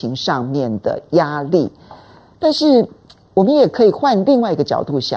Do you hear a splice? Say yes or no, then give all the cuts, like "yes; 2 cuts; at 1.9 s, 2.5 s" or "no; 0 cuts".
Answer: no; 0 cuts